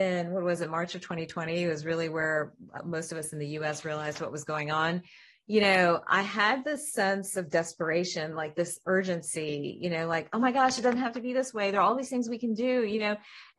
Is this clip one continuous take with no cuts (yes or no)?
yes